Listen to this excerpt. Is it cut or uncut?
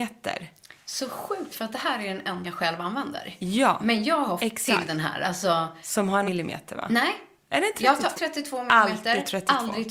cut